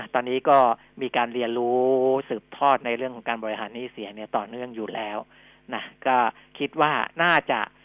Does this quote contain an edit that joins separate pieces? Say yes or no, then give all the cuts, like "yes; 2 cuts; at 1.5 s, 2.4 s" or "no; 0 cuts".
no; 0 cuts